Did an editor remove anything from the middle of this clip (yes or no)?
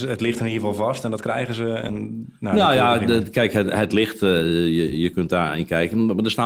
no